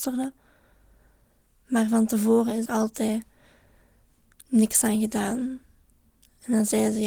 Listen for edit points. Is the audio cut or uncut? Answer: cut